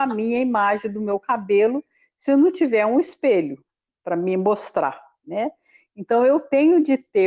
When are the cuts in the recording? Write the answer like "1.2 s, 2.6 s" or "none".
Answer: none